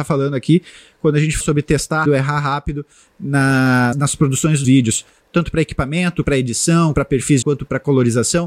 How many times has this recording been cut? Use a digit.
7